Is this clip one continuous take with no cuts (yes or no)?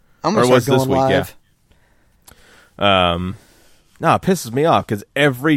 yes